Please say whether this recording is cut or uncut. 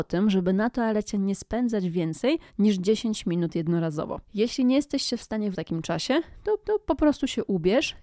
cut